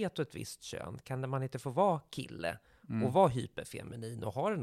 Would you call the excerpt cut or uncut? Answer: uncut